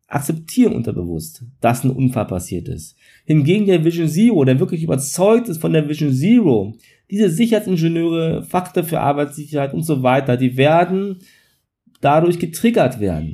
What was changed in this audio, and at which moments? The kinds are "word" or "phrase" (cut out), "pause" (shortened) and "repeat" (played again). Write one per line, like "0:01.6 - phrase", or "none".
none

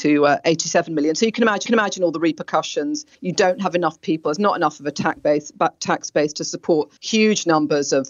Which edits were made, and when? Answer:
0:01.7 - repeat
0:03.1 - pause
0:07.0 - pause

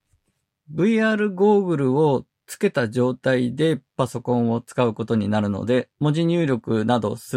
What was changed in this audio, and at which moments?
0:03.9 - pause
0:05.9 - pause

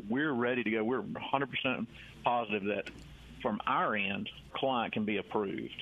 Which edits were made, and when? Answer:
0:01.2 - word
0:04.5 - word

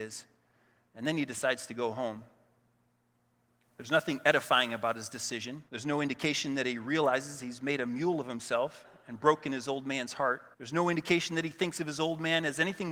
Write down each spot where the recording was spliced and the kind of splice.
0:05.7 - pause
0:10.5 - pause

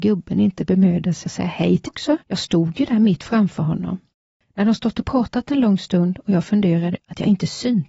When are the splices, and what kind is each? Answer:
0:01.3 - word
0:01.9 - word
0:02.2 - pause
0:04.1 - pause
0:07.0 - word

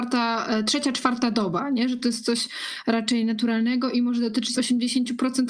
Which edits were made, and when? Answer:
0:04.6 - word

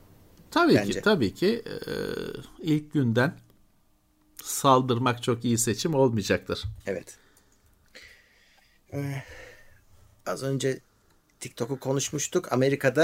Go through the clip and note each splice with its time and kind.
0:06.8 - pause

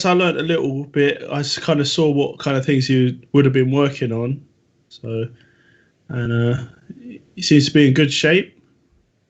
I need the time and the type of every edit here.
none

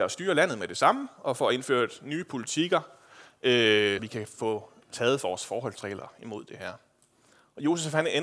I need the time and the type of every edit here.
0:04.0 - word

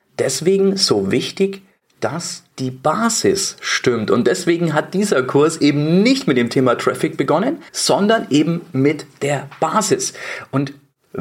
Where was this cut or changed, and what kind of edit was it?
0:02.5 - pause
0:07.7 - pause

